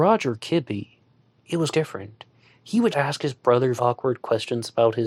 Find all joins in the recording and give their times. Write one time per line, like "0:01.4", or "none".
0:01.7
0:02.9
0:03.8